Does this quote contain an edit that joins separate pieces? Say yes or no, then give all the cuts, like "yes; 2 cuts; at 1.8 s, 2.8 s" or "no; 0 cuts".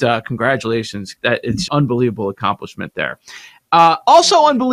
yes; 2 cuts; at 1.2 s, 1.7 s